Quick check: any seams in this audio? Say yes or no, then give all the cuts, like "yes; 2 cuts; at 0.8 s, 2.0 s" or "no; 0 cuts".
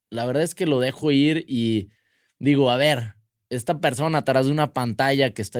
no; 0 cuts